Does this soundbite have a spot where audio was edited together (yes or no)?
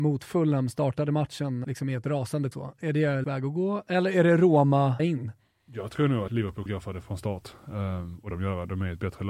yes